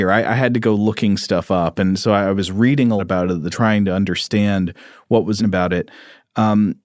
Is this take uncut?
no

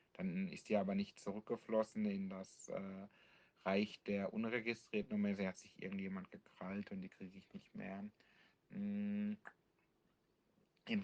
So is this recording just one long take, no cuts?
yes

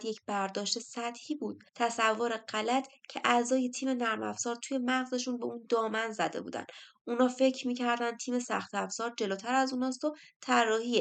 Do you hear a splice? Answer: yes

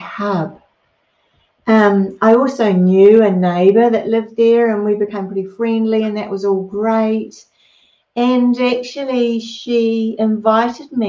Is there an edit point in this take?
no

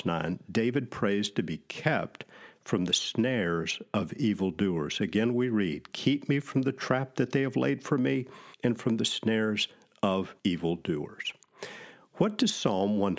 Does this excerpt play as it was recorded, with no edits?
no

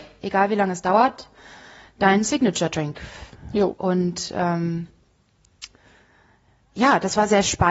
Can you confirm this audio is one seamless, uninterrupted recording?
yes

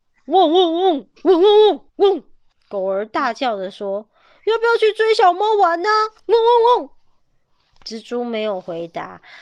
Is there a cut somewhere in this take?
yes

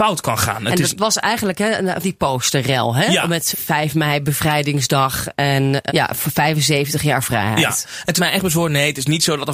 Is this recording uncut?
no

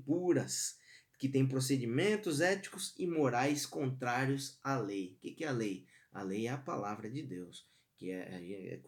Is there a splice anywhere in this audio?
no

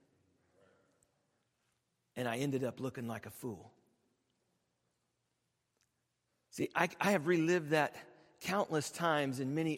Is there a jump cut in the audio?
no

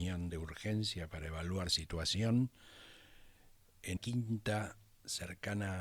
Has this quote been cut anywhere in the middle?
yes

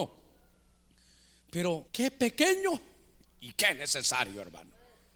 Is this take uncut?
no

